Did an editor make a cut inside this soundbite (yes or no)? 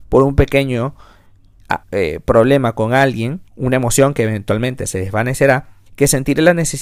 yes